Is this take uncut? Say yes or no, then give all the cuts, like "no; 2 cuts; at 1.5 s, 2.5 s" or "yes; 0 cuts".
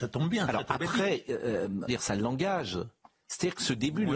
no; 1 cut; at 1.9 s